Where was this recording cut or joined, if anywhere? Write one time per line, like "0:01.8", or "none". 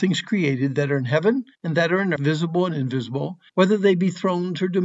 0:01.5
0:02.2
0:03.5